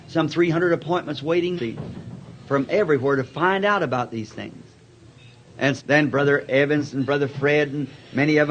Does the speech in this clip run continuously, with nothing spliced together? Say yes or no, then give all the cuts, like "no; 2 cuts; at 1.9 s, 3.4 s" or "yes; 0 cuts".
no; 2 cuts; at 1.6 s, 5.8 s